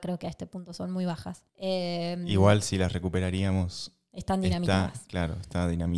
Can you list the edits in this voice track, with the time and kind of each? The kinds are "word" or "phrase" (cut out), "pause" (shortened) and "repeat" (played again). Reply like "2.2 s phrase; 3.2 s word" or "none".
1.5 s pause